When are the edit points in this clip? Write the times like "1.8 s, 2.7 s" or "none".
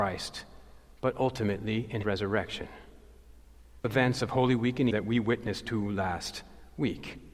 2.0 s, 3.8 s, 4.9 s